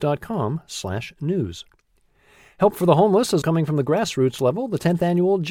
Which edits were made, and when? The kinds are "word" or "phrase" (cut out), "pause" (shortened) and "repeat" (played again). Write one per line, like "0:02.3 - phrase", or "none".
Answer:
0:03.4 - word